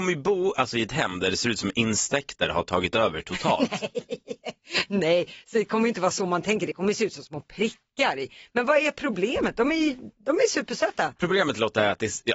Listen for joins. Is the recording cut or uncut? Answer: uncut